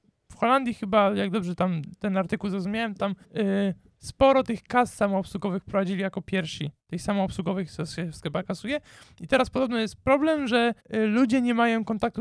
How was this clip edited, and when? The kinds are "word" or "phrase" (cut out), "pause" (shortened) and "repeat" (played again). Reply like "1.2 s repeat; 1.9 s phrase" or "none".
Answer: 3.2 s pause; 6.8 s pause; 10.8 s pause